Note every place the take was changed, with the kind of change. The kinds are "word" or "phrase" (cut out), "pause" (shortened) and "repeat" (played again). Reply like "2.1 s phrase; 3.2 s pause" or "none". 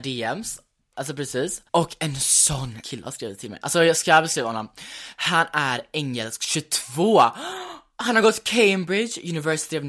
1.7 s pause; 2.8 s word